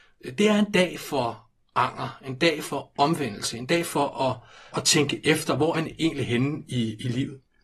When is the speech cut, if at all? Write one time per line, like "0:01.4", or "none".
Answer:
0:04.7
0:05.7